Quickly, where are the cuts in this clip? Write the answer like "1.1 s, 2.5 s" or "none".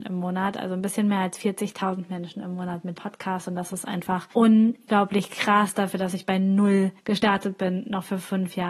3.0 s, 4.3 s, 7.0 s